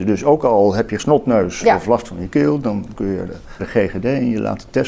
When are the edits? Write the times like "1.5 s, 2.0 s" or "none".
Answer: 1.0 s, 2.9 s, 3.3 s, 3.6 s